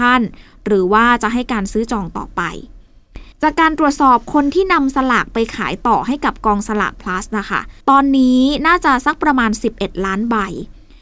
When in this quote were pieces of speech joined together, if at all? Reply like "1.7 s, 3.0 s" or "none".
3.3 s, 7.8 s

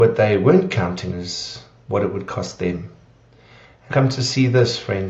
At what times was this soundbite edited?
1.1 s, 3.9 s

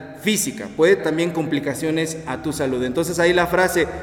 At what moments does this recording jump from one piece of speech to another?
1.0 s

